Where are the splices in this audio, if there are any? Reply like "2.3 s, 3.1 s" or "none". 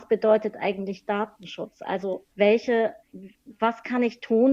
2.3 s